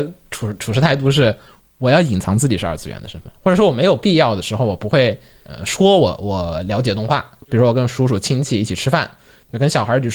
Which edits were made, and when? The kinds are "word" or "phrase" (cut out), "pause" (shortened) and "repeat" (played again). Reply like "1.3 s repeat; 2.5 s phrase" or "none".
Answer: 7.4 s word